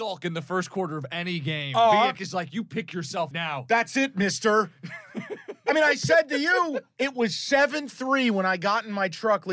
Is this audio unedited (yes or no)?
no